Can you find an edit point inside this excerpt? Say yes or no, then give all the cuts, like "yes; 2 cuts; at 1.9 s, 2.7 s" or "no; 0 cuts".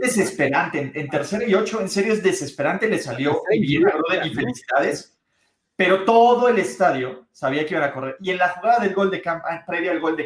no; 0 cuts